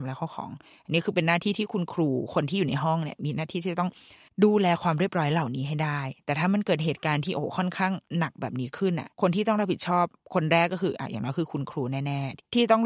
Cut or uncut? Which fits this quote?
cut